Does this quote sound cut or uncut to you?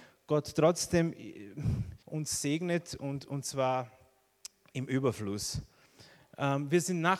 cut